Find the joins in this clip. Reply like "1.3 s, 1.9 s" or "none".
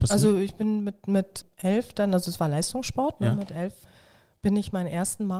none